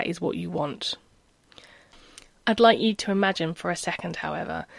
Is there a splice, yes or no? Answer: no